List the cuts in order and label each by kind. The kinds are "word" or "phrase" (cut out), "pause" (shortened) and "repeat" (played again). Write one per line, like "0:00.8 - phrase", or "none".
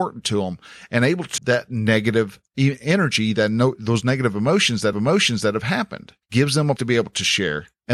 0:01.4 - word
0:02.5 - pause
0:04.9 - repeat
0:06.2 - pause
0:06.8 - word